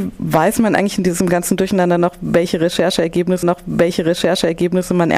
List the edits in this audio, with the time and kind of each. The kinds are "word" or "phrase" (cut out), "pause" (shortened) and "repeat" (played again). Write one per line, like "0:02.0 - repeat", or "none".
0:03.4 - repeat